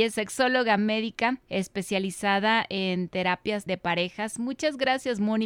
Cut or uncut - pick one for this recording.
cut